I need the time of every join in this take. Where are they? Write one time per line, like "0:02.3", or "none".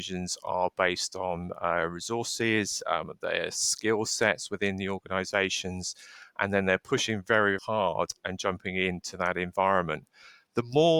0:07.6